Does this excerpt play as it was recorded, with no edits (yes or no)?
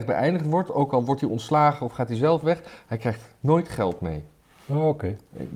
yes